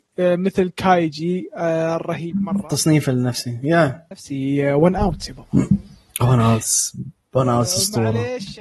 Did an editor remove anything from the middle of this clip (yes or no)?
no